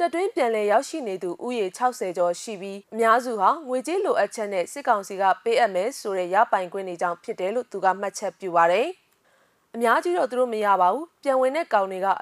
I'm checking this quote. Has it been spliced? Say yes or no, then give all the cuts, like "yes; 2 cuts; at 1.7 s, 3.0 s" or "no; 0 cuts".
yes; 1 cut; at 2.8 s